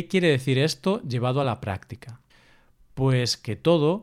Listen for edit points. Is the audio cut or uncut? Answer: uncut